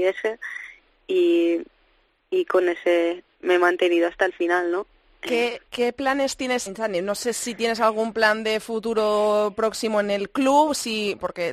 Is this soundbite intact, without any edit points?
no; 3 cuts; at 3.3 s, 5.7 s, 6.7 s

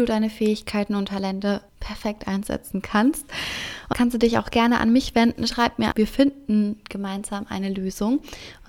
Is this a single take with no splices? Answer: no; 3 cuts; at 1.7 s, 3.9 s, 5.9 s

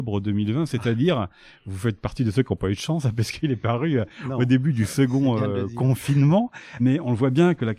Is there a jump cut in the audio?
no; 0 cuts

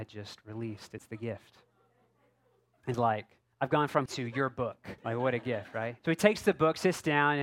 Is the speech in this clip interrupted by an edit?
yes; 6 cuts; at 1.0 s, 2.9 s, 3.5 s, 4.1 s, 5.0 s, 6.0 s

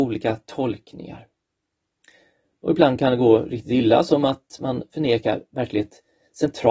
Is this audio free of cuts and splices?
yes; 0 cuts

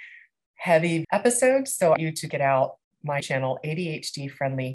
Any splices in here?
yes; 5 cuts; at 1.0 s, 2.0 s, 2.3 s, 2.8 s, 3.2 s

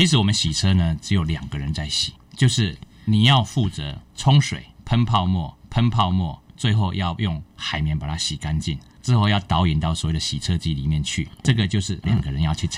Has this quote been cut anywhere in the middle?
yes; 1 cut; at 5.6 s

